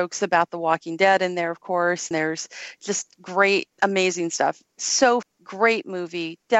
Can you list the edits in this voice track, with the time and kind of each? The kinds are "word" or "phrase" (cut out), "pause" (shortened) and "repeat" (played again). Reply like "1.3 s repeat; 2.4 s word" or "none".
2.1 s word; 3.7 s word; 5.2 s word